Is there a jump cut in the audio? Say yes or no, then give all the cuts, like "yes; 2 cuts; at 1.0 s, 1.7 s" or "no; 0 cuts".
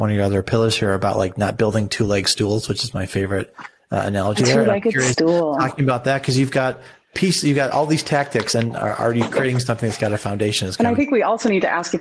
no; 0 cuts